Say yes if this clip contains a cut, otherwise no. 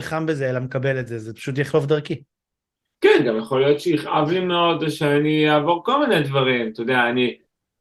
no